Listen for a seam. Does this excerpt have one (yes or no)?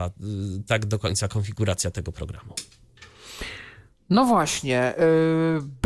no